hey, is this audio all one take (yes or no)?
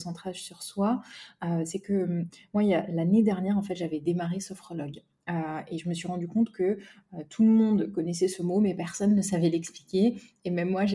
yes